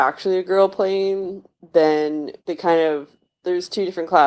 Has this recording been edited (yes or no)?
yes